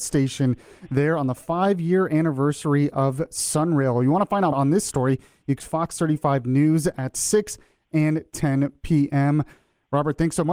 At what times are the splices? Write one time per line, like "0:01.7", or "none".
0:04.5
0:05.6